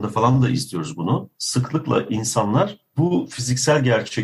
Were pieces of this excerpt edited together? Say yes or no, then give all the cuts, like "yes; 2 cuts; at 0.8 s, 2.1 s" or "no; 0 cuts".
yes; 1 cut; at 1.3 s